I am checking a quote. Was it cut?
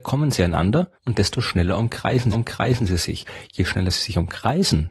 yes; 2 cuts; at 0.9 s, 2.3 s

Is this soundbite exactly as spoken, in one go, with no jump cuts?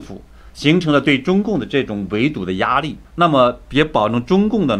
no; 1 cut; at 3.0 s

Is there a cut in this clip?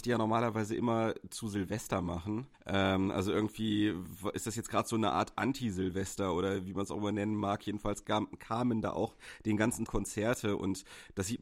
yes; 3 cuts; at 2.5 s, 8.0 s, 9.9 s

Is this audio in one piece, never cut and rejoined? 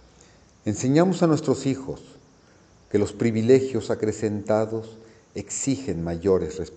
yes; 0 cuts

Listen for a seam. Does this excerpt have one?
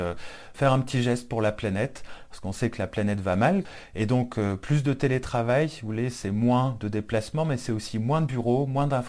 no; 0 cuts

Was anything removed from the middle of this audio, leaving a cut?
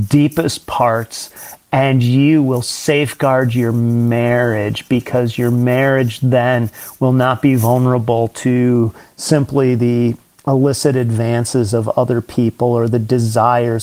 no; 0 cuts

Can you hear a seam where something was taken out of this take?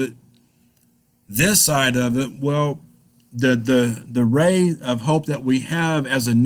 no; 0 cuts

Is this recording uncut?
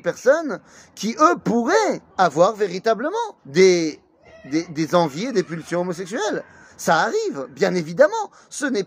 no; 2 cuts; at 2.1 s, 3.4 s

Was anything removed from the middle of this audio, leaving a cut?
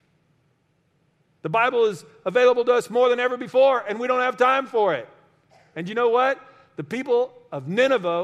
no; 0 cuts

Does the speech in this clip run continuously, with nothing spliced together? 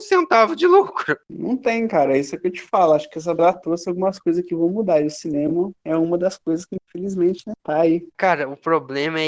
no; 2 cuts; at 3.4 s, 7.6 s

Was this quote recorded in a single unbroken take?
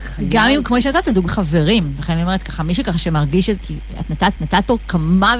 no; 3 cuts; at 1.3 s, 3.6 s, 4.4 s

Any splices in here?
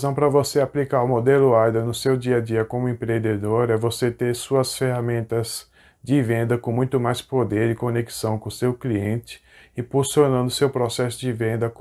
no; 0 cuts

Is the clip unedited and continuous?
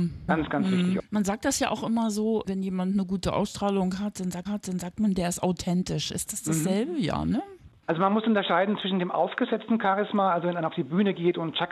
no; 2 cuts; at 2.4 s, 4.5 s

